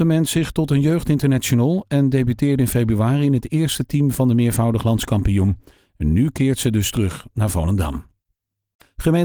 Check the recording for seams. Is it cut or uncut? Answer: uncut